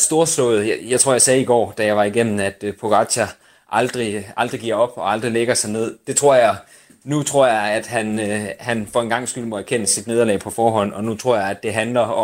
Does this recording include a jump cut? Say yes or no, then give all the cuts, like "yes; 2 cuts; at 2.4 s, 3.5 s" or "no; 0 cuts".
no; 0 cuts